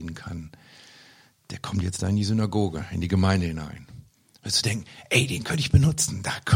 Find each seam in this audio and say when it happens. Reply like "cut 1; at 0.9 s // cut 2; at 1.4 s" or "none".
none